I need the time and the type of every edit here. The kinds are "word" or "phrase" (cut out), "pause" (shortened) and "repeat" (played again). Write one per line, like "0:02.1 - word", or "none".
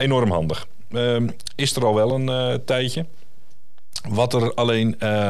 none